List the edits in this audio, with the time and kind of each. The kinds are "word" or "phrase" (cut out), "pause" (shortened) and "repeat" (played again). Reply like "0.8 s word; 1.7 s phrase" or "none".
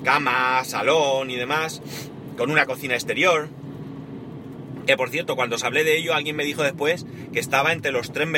none

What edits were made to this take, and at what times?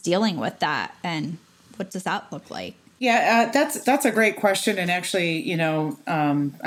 none

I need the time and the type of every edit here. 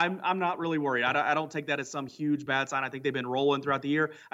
none

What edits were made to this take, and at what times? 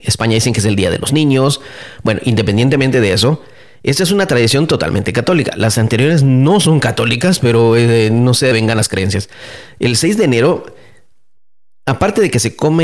8.5 s word

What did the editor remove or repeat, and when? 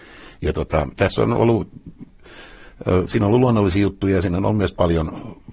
none

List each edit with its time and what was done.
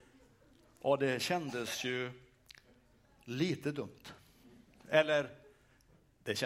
none

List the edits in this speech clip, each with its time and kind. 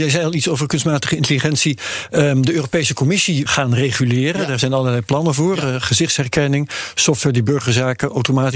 3.5 s phrase

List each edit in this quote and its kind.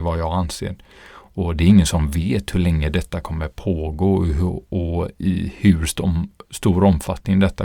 none

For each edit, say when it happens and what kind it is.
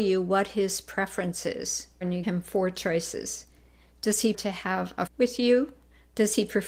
2.2 s word; 4.3 s word; 5.1 s word

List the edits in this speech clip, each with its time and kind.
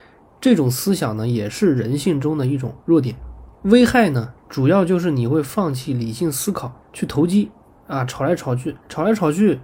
2.8 s pause; 3.5 s pause; 4.4 s pause; 6.8 s pause

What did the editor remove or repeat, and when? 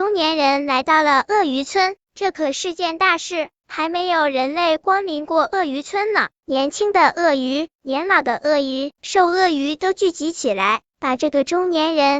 8.9 s phrase

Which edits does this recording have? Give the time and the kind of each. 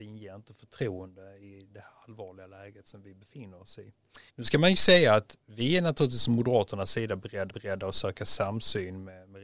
4.3 s pause; 7.5 s repeat

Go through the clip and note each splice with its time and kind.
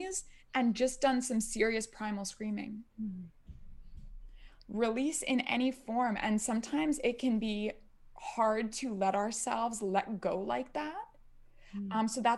2.9 s pause

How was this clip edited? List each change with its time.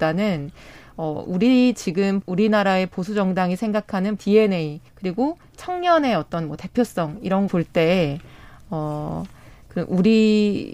2.2 s word; 4.2 s word; 4.9 s pause; 7.5 s phrase

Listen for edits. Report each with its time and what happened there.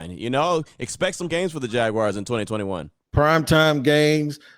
1.3 s word

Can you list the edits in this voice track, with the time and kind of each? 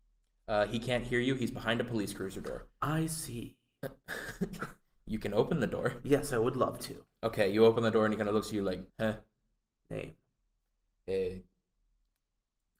8.9 s pause; 10.4 s pause

